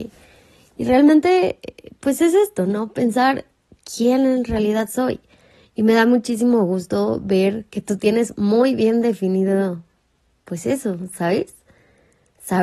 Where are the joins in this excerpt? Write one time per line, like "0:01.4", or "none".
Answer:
none